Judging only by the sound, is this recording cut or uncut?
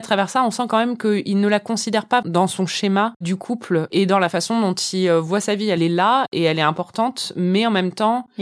cut